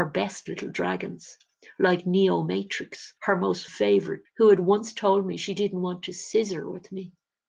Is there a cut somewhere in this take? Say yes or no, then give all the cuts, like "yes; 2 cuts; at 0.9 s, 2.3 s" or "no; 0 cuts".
yes; 3 cuts; at 3.2 s, 3.7 s, 4.2 s